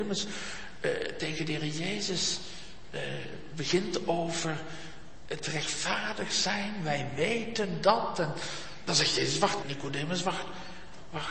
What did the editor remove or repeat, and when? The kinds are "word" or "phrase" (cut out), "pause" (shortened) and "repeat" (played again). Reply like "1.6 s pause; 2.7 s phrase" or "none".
9.6 s word